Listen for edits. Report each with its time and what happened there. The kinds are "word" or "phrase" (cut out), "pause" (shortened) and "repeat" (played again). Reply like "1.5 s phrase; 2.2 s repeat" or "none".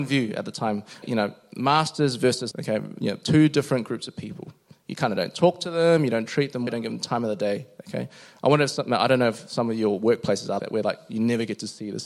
1.0 s word; 2.5 s word; 6.7 s word; 10.6 s word